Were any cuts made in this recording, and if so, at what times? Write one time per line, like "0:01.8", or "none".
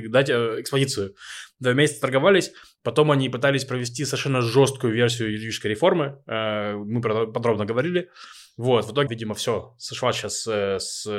0:09.1